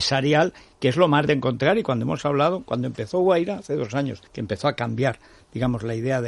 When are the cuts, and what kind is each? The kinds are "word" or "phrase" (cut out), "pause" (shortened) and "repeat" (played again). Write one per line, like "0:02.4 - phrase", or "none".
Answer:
0:01.3 - word
0:04.3 - pause